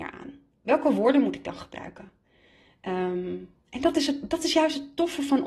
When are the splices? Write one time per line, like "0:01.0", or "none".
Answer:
none

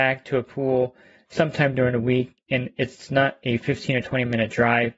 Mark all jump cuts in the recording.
none

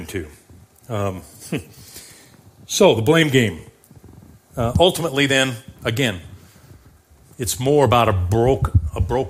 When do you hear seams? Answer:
none

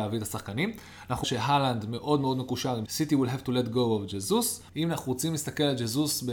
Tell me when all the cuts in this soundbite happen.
0:01.2
0:02.9
0:04.7

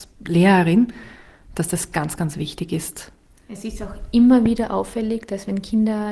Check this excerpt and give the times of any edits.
none

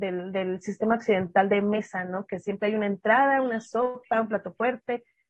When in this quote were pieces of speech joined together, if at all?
none

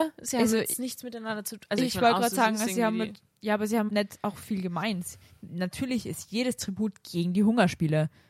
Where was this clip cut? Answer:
0:03.9

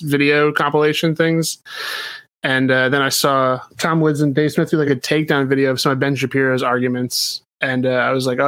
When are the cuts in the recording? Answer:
0:03.7
0:04.9

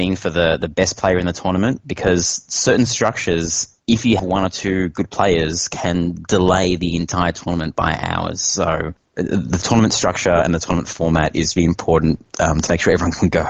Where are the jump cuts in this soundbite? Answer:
0:04.2
0:11.6
0:12.3

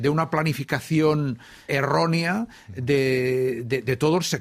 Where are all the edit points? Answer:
0:01.7

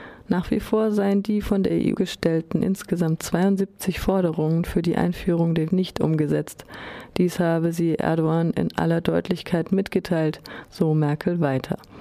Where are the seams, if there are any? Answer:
0:02.0
0:05.7

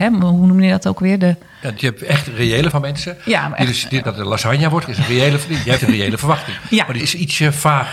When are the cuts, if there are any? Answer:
0:01.8
0:02.7
0:04.0
0:04.9
0:05.8
0:07.0

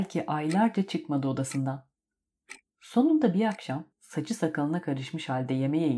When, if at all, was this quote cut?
0:03.9

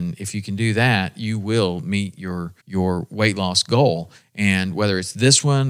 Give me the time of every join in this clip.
0:02.6

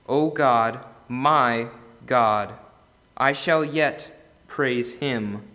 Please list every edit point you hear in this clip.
none

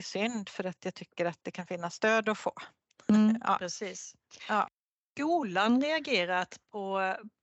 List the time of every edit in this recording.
none

